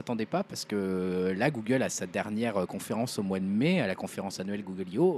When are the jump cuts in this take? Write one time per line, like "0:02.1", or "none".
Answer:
none

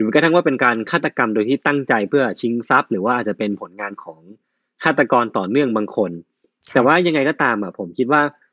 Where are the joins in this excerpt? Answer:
none

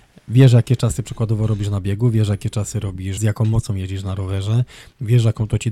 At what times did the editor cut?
0:03.2

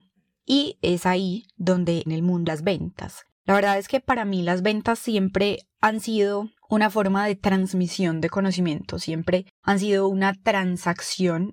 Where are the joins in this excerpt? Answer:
0:02.1
0:02.5
0:03.3
0:05.7
0:06.6
0:09.5

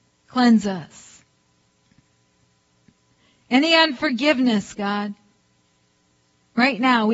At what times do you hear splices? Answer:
none

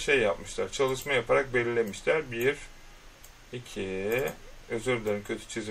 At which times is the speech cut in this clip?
none

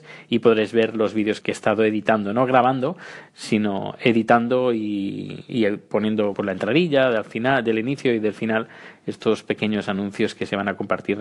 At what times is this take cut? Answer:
0:01.4
0:06.3

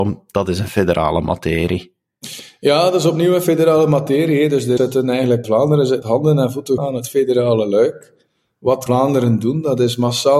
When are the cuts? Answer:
0:04.8
0:05.4
0:06.0
0:06.8
0:08.9

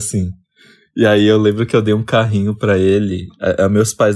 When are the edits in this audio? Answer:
none

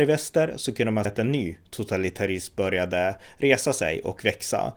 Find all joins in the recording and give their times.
0:01.0

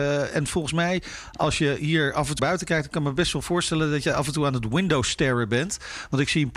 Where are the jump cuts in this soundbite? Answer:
0:02.4

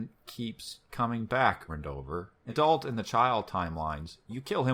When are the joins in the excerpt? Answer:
0:01.7
0:02.5

